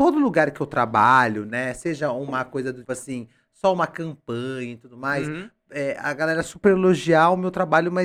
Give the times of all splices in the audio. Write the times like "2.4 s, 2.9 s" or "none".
2.8 s